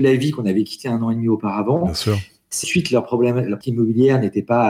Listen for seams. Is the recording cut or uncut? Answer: cut